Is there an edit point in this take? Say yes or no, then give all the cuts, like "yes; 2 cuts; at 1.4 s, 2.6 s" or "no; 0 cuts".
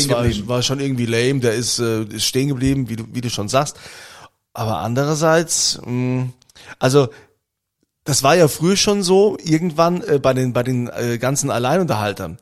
no; 0 cuts